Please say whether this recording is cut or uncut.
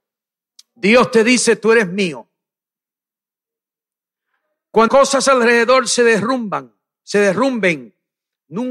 cut